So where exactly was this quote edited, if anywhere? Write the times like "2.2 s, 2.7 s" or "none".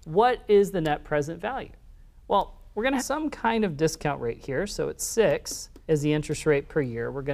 3.0 s, 5.8 s